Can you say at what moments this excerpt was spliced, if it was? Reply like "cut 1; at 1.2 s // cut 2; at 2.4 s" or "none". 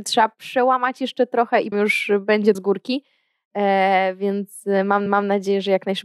cut 1; at 1.7 s // cut 2; at 2.5 s // cut 3; at 5.1 s